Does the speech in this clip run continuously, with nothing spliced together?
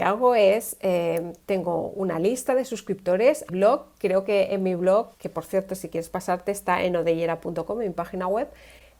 no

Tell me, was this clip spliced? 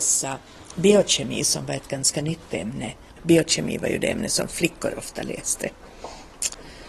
no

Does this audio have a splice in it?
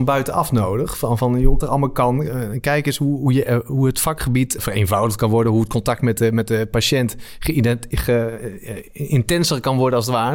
yes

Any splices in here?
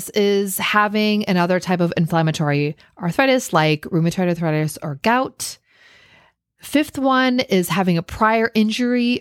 no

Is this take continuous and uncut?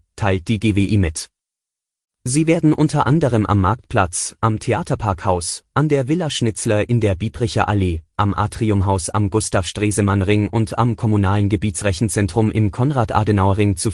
yes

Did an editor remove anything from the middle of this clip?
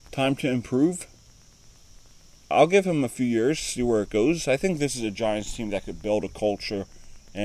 no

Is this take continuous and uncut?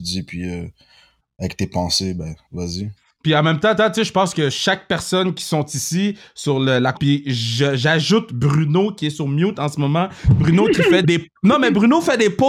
no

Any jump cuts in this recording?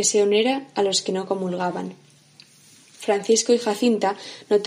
no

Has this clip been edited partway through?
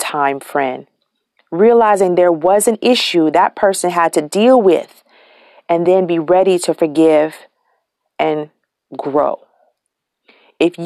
no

